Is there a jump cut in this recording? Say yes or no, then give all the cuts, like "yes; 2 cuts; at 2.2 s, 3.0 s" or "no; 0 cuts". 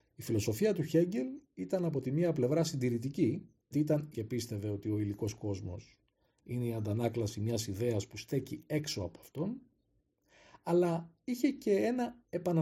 yes; 2 cuts; at 3.7 s, 4.1 s